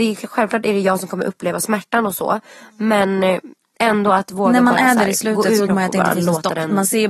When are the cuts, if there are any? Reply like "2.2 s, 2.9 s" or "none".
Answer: 5.7 s